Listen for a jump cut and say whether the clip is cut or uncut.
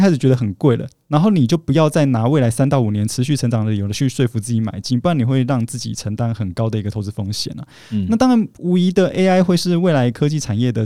uncut